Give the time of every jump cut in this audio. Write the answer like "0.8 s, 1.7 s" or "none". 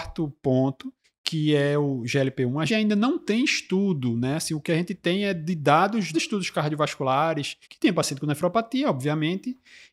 1.0 s, 2.7 s, 6.1 s, 7.6 s